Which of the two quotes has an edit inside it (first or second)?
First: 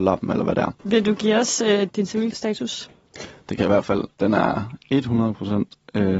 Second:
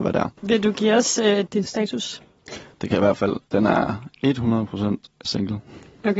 second